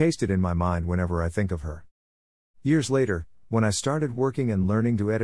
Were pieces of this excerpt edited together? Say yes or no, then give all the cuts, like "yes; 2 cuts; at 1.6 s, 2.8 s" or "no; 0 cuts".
no; 0 cuts